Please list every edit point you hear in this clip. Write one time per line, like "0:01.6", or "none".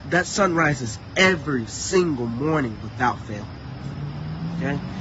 none